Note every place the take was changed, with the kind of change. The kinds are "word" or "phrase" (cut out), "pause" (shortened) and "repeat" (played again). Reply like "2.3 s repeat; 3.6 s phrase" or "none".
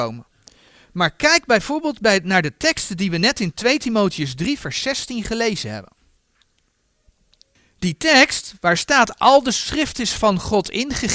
none